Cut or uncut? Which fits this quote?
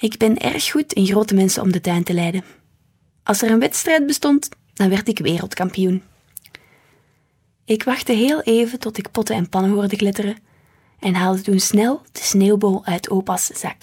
uncut